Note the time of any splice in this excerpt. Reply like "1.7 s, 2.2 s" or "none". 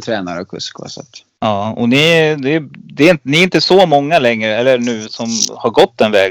1.3 s, 5.1 s